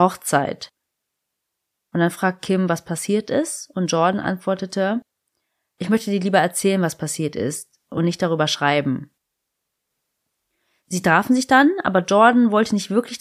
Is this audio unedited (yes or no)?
yes